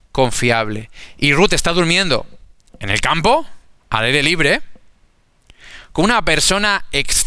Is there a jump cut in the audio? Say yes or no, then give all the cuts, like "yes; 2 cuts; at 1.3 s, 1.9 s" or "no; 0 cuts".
no; 0 cuts